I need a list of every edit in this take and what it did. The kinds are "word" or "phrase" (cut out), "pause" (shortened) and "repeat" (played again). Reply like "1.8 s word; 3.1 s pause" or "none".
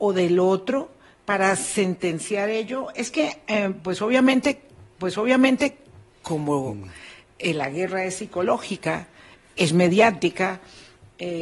5.0 s repeat